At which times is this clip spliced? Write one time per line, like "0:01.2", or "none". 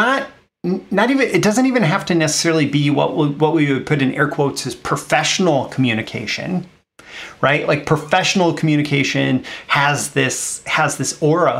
none